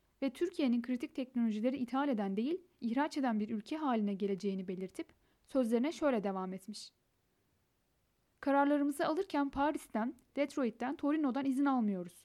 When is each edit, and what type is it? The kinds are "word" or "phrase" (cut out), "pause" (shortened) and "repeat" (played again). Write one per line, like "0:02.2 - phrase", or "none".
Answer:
none